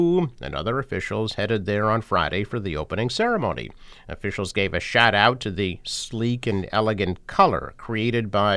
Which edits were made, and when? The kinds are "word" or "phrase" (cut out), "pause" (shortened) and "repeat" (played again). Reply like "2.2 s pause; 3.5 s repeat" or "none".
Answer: none